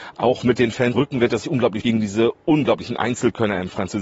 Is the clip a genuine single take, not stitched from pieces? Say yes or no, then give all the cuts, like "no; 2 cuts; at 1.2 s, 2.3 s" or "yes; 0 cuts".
no; 3 cuts; at 0.9 s, 1.4 s, 1.8 s